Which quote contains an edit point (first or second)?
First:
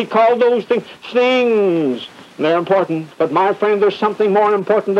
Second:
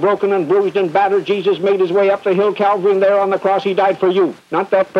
first